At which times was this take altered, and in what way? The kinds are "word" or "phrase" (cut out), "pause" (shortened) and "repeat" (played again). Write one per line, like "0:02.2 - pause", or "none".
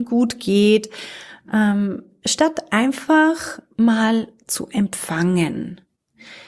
none